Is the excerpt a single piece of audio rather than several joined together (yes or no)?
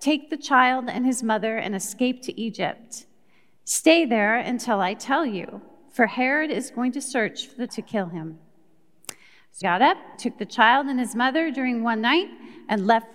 no